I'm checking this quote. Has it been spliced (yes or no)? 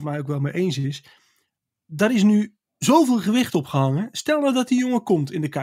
no